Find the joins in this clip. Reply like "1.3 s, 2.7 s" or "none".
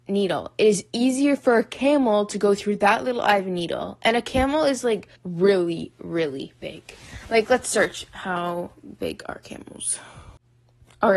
5.2 s